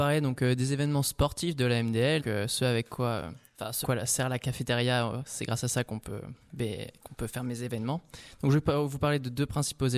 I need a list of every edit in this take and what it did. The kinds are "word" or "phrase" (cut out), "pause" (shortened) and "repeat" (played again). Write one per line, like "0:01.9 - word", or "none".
0:02.2 - word
0:03.5 - pause
0:03.8 - word